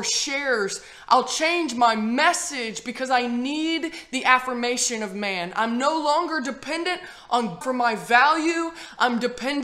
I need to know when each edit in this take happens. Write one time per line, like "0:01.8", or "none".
0:07.6